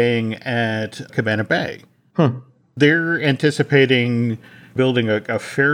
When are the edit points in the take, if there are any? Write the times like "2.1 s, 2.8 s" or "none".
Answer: none